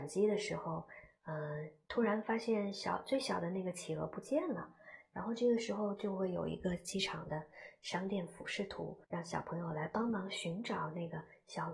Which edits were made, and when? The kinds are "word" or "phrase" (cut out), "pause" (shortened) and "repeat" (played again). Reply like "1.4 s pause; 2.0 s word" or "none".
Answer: 9.0 s pause